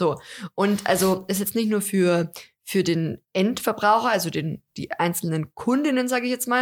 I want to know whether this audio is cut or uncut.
cut